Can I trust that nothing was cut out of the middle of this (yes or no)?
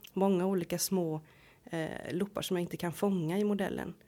yes